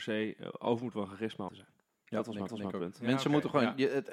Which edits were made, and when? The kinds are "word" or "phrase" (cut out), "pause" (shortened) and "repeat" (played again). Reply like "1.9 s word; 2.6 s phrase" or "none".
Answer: 0.9 s word; 1.5 s phrase; 2.5 s repeat